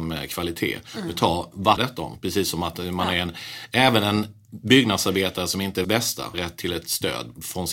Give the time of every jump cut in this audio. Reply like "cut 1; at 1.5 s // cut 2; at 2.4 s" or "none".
cut 1; at 1.8 s // cut 2; at 5.8 s // cut 3; at 6.3 s

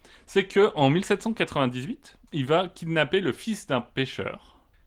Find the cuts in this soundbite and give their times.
cut 1; at 2.3 s

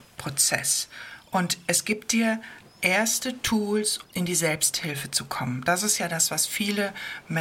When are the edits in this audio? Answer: cut 1; at 4.0 s

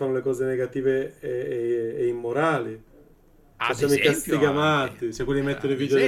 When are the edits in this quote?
none

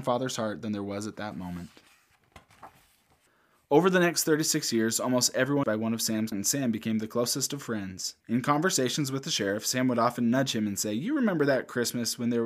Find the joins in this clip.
cut 1; at 3.3 s // cut 2; at 5.6 s // cut 3; at 6.3 s // cut 4; at 8.2 s

